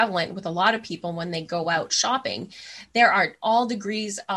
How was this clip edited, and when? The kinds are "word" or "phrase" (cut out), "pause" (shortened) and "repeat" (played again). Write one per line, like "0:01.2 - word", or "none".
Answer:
none